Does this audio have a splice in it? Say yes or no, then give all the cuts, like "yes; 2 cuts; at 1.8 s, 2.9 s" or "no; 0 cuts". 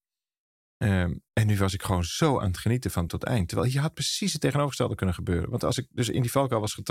yes; 2 cuts; at 1.3 s, 3.1 s